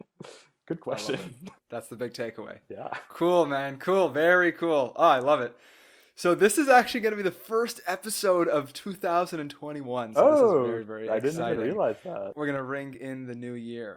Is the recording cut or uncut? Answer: uncut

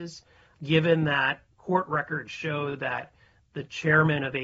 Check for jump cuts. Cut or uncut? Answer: uncut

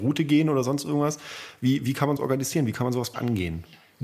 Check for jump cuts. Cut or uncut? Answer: cut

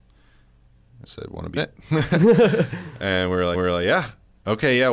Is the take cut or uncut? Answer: cut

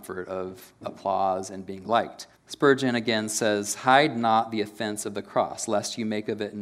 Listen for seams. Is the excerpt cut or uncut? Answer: cut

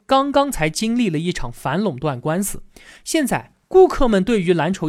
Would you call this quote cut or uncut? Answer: uncut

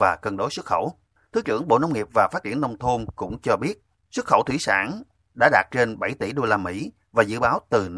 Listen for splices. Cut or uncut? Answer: uncut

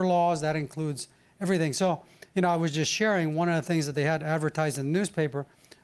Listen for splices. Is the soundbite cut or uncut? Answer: uncut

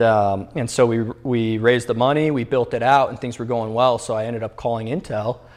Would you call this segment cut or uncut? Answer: uncut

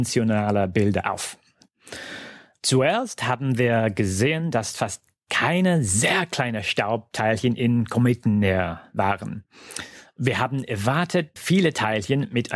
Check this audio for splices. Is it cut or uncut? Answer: cut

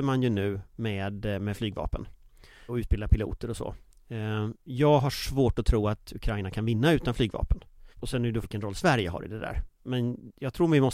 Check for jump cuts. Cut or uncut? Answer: cut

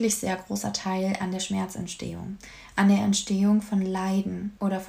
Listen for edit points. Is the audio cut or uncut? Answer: uncut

